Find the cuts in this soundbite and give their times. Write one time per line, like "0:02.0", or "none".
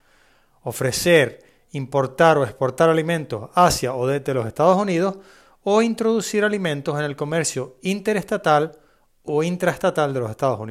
none